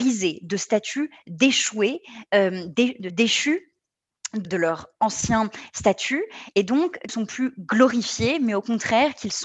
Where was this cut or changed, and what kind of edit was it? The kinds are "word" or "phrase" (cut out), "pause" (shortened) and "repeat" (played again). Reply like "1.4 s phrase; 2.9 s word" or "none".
3.1 s word; 4.4 s word; 7.1 s phrase